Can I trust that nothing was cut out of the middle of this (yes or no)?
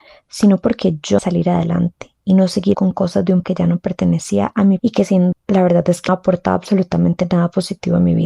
no